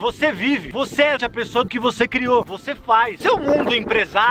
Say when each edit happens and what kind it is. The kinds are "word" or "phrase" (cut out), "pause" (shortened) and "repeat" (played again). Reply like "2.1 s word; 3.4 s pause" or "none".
1.2 s word; 1.7 s word; 2.4 s phrase